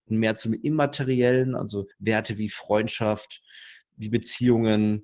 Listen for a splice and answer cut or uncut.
cut